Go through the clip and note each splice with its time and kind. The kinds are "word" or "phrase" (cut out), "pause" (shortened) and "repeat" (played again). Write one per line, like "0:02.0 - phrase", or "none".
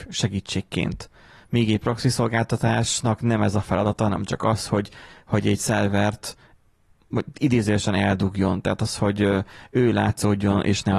none